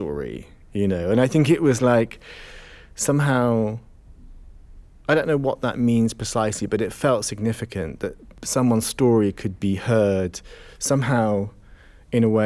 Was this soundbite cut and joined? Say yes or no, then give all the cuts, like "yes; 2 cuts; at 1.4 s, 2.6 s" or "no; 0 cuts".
no; 0 cuts